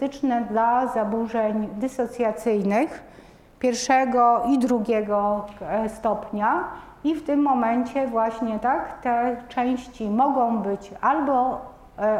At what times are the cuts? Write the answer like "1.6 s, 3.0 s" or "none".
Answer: none